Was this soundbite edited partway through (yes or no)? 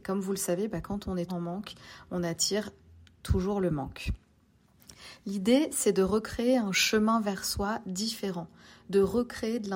yes